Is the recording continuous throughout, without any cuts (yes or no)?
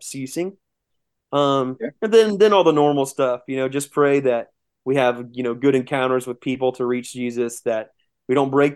yes